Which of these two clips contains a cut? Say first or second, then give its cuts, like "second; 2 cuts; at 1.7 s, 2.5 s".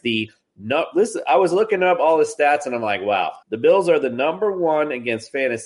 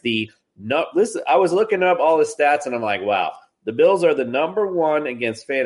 first; 1 cut; at 3.4 s